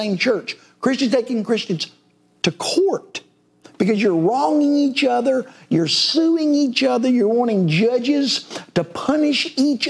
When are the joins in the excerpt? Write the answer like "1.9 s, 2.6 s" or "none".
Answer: none